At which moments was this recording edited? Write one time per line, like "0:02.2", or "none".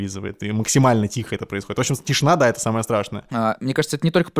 none